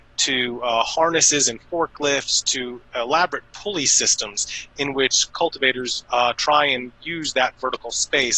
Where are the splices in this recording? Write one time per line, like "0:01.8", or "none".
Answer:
none